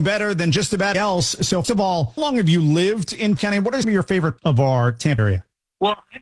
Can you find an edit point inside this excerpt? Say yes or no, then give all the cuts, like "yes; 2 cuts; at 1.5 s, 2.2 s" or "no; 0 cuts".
yes; 7 cuts; at 0.9 s, 1.6 s, 2.2 s, 3.4 s, 3.8 s, 4.4 s, 5.2 s